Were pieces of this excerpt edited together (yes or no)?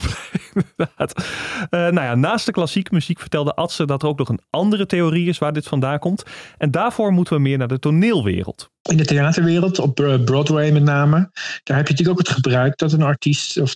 yes